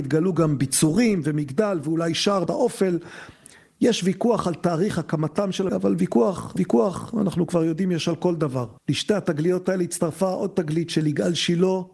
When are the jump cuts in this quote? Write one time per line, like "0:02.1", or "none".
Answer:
0:02.5
0:05.7
0:06.6
0:08.8